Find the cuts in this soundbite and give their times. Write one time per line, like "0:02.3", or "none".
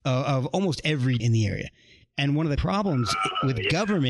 0:01.2
0:02.6